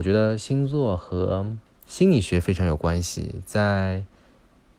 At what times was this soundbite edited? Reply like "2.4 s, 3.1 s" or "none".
1.7 s